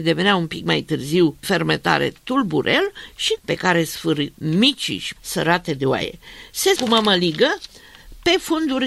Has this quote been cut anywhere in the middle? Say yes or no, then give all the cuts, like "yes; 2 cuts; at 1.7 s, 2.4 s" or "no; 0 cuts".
yes; 5 cuts; at 1.4 s, 3.4 s, 4.3 s, 5.2 s, 6.8 s